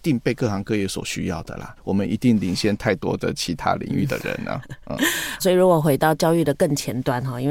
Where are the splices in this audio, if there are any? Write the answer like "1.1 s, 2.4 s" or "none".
1.8 s, 5.4 s